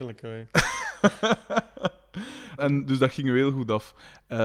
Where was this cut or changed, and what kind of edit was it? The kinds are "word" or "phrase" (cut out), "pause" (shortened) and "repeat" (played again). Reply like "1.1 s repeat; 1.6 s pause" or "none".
2.6 s word